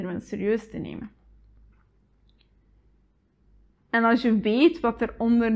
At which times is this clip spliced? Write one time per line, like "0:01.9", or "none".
none